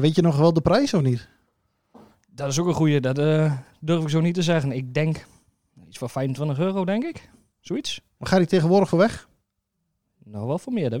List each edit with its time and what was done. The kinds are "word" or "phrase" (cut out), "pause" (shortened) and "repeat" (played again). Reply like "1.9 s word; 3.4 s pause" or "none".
none